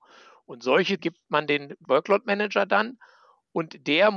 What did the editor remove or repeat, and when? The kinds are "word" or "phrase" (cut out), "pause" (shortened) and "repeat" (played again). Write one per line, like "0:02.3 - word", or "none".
0:01.0 - word
0:01.8 - word